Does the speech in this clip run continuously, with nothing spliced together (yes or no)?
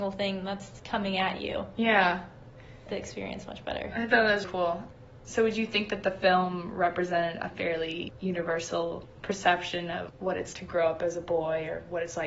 no